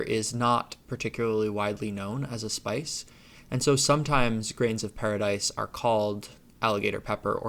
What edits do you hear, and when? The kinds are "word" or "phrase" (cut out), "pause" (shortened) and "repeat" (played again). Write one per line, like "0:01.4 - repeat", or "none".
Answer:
none